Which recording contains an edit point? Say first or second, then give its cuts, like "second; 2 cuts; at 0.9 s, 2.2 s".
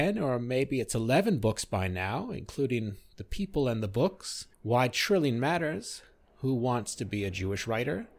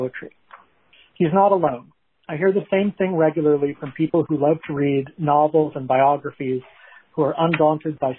first; 1 cut; at 4.5 s